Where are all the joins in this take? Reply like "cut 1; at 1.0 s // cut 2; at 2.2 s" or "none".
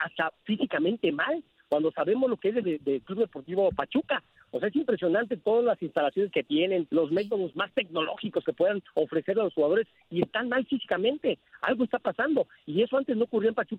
cut 1; at 2.6 s // cut 2; at 6.9 s